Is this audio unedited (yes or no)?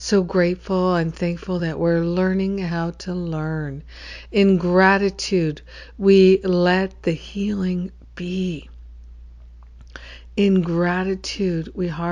yes